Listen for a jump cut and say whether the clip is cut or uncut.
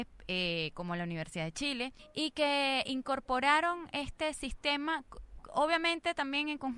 cut